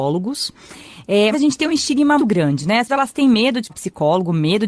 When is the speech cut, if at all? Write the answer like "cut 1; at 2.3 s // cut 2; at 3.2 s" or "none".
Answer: cut 1; at 1.3 s // cut 2; at 2.2 s // cut 3; at 2.9 s // cut 4; at 3.7 s